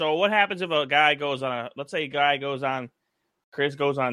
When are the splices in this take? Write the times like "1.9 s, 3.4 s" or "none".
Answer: none